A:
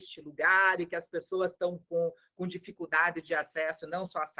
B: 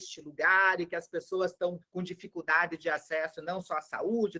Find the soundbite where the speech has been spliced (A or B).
B